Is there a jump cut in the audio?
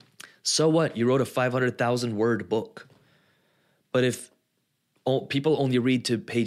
no; 0 cuts

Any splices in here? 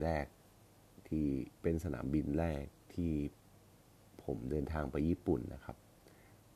yes; 1 cut; at 1.6 s

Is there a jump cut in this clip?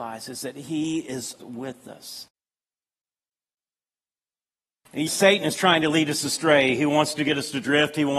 yes; 2 cuts; at 1.4 s, 5.1 s

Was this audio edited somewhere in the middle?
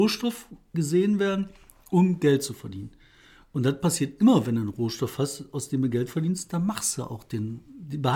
no; 0 cuts

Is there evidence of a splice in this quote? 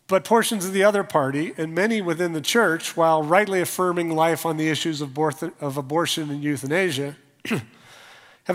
no; 0 cuts

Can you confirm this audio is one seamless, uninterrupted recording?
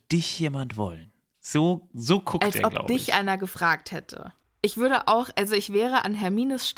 yes; 0 cuts

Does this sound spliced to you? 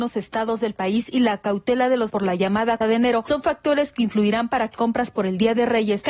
yes; 3 cuts; at 2.1 s, 2.8 s, 4.7 s

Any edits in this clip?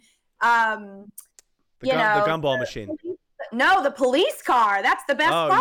no; 0 cuts

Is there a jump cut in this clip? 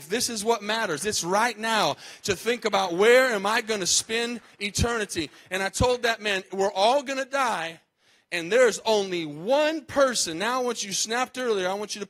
no; 0 cuts

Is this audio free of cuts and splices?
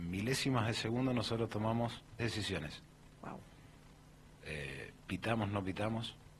no; 1 cut; at 2.2 s

